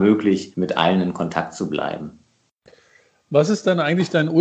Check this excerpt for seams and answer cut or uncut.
uncut